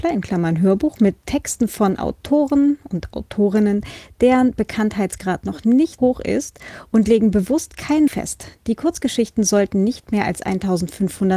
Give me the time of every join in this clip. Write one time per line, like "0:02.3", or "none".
0:06.0
0:08.1